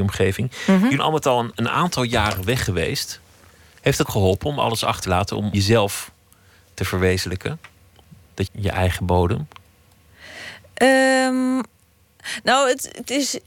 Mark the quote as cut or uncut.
cut